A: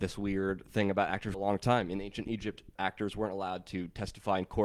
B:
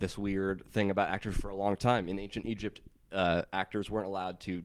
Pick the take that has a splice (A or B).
A